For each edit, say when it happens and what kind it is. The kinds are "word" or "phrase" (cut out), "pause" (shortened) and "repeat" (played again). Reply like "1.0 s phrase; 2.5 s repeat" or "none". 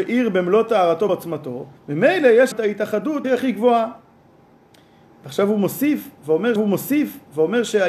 1.1 s word; 1.8 s pause; 2.5 s word; 3.2 s word; 6.6 s repeat

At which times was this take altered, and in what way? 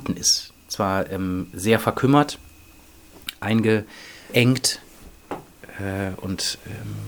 4.3 s word

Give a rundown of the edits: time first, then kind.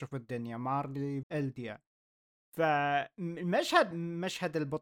1.2 s word; 3.9 s word

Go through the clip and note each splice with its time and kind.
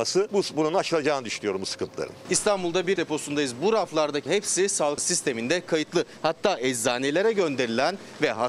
3.0 s word; 4.3 s word; 5.0 s word

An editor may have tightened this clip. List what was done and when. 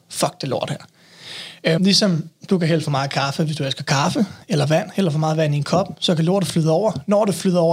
1.8 s word

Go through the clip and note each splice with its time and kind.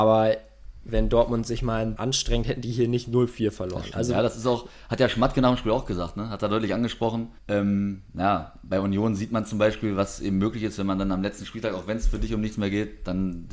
2.0 s word; 7.4 s pause

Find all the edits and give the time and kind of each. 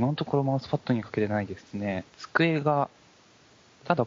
2.1 s pause

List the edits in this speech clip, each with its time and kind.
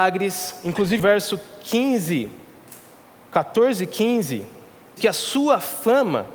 1.0 s word; 3.0 s pause; 5.0 s word

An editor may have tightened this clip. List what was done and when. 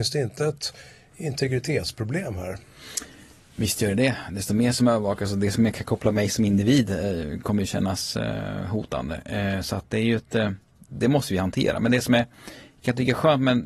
none

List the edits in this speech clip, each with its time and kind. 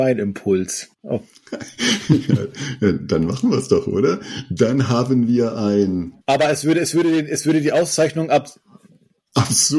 0.9 s pause; 6.2 s pause

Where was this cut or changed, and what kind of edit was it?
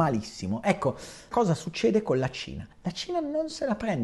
1.3 s word; 2.7 s pause

